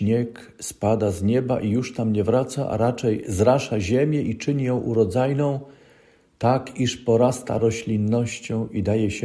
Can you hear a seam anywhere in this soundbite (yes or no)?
no